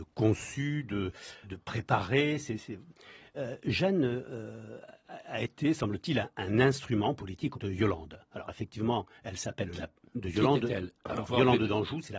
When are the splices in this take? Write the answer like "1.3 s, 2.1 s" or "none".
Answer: 1.4 s, 7.5 s